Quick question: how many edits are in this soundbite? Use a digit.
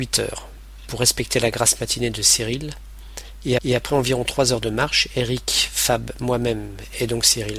1